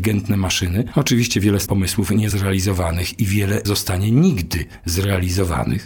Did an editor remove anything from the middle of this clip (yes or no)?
yes